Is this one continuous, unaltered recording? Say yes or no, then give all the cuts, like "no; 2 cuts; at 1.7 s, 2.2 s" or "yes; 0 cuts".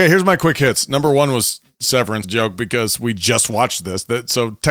no; 1 cut; at 2.2 s